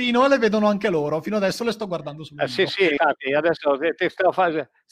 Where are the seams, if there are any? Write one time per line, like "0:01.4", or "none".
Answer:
none

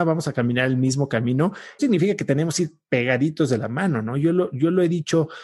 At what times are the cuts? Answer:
0:01.8

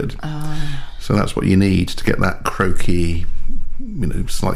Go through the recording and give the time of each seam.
none

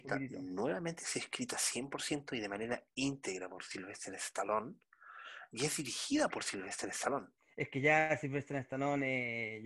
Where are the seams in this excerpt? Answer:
0:07.4

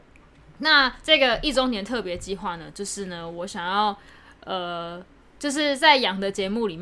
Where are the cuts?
0:05.2

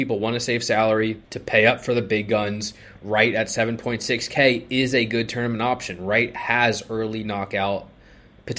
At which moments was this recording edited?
0:01.2

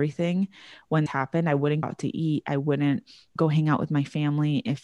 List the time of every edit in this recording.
0:01.1
0:01.8
0:03.4

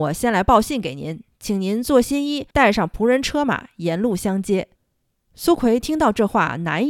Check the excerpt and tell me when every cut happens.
0:02.5
0:04.7

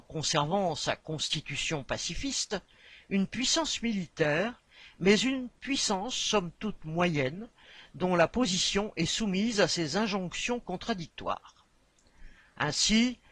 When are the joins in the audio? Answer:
none

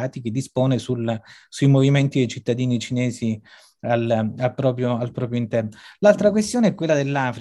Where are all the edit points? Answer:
none

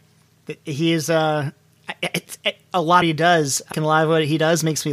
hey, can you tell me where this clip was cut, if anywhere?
0:03.0
0:03.7

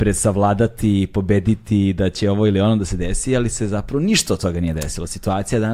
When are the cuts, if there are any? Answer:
none

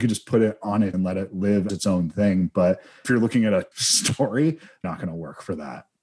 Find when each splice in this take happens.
0:00.9
0:01.7
0:03.0
0:03.7
0:04.8

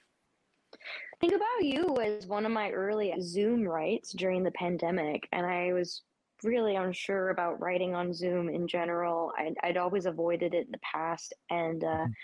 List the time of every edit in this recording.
0:03.1

